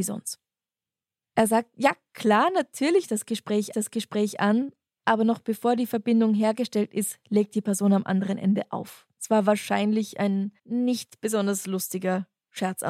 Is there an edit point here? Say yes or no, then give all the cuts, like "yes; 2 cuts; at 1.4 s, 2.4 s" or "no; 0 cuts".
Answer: yes; 4 cuts; at 3.0 s, 3.7 s, 9.1 s, 10.6 s